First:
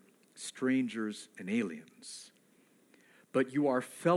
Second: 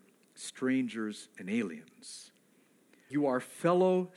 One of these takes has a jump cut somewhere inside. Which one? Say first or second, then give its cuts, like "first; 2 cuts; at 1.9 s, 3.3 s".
second; 1 cut; at 3.1 s